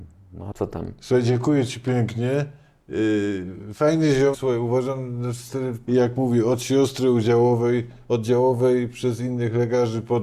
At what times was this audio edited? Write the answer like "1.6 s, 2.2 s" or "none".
4.3 s, 5.9 s

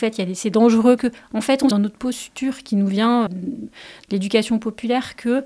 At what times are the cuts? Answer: 1.0 s, 1.7 s, 3.3 s

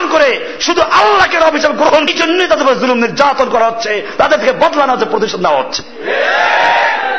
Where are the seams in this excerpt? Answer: 2.1 s

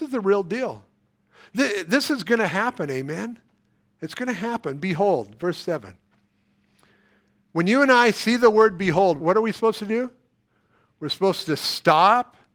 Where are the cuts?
9.2 s

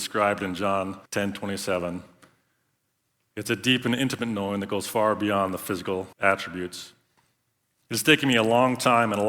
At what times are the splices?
1.1 s, 6.1 s

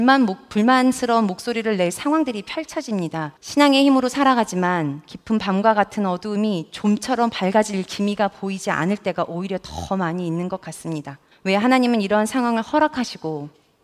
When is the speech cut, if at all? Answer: 3.4 s, 11.3 s

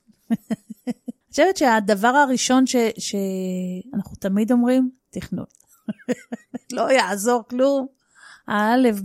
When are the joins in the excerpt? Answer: 1.2 s, 5.0 s

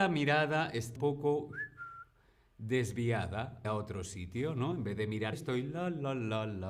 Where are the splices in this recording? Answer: 1.0 s, 3.6 s, 5.3 s

